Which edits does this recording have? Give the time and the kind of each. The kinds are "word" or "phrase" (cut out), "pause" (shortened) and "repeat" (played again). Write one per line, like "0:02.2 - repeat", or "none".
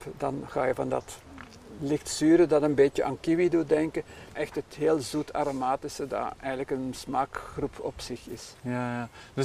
0:04.3 - word